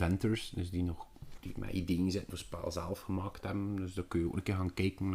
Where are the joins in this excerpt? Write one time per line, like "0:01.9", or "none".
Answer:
0:02.3